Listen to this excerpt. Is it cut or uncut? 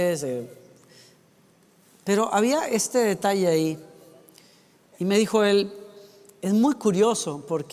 uncut